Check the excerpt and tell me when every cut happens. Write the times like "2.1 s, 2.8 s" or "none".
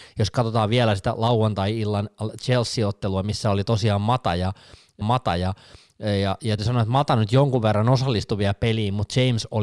5.0 s, 6.6 s

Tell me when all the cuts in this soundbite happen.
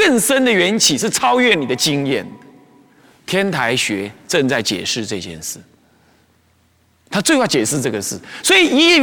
none

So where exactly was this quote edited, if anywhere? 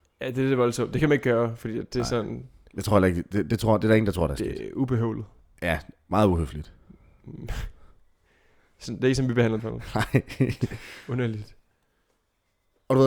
9.6 s

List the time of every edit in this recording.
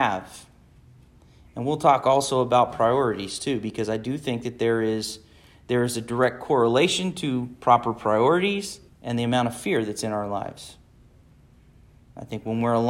8.9 s

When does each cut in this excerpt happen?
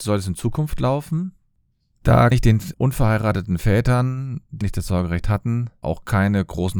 2.3 s, 2.7 s, 4.6 s

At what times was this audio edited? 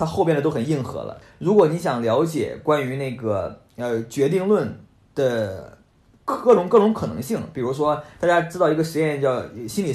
none

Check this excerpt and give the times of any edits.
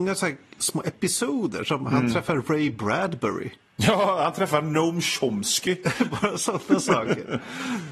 none

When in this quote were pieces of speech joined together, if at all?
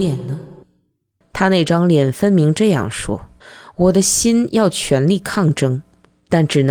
3.4 s

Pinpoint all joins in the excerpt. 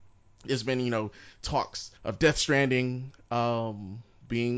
2.0 s

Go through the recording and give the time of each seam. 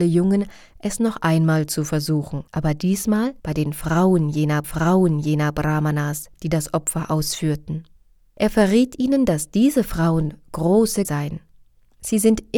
2.5 s, 3.4 s, 4.6 s, 8.0 s, 11.0 s

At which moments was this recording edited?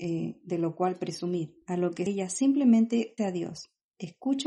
1.6 s, 2.1 s, 3.2 s

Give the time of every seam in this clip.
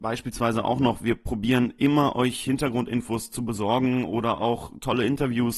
none

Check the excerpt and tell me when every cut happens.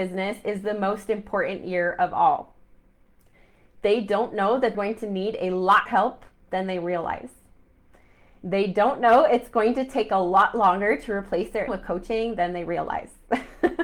4.7 s, 5.9 s, 11.7 s

